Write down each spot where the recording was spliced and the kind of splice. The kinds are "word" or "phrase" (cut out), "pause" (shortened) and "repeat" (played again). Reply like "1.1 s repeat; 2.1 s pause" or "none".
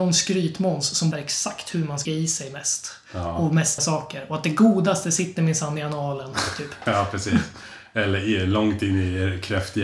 1.1 s word; 2.1 s word; 3.8 s word

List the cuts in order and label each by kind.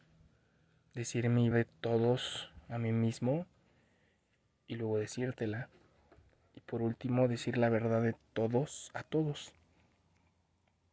1.5 s word

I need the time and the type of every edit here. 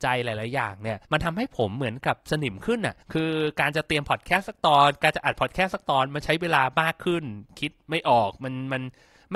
1.0 s pause; 3.0 s pause

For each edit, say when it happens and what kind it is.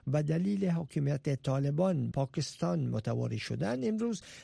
2.1 s word

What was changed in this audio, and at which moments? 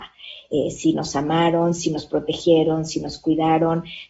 none

